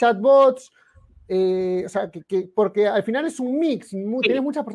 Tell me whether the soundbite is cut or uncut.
uncut